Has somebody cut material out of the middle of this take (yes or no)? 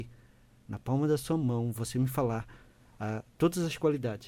no